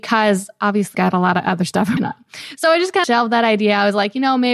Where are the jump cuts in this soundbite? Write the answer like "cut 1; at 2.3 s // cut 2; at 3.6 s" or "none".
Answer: cut 1; at 0.9 s // cut 2; at 2.0 s // cut 3; at 3.0 s